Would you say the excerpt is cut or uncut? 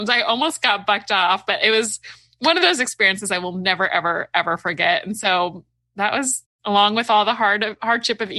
uncut